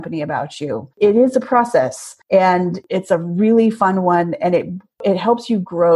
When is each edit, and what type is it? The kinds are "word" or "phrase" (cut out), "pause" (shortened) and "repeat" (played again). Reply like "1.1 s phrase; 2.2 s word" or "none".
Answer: 0.9 s pause; 2.2 s pause